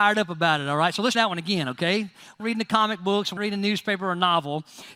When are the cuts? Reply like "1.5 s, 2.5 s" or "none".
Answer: 1.1 s, 2.4 s, 3.4 s